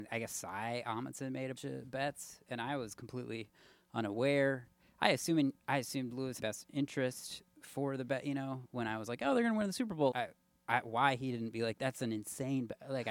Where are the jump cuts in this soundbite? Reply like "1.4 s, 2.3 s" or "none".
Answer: 1.6 s, 5.6 s, 6.4 s, 10.1 s